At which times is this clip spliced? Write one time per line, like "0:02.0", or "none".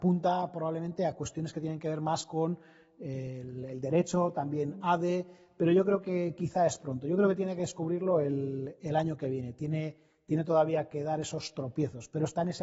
none